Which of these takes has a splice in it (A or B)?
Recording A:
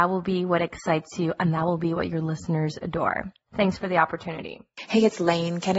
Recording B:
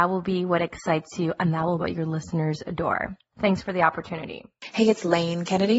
B